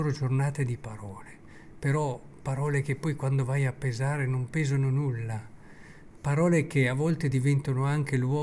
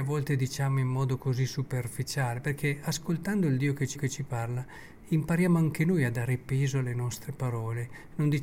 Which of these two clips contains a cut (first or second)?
second